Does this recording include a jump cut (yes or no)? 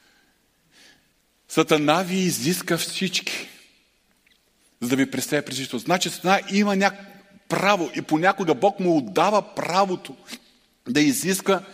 no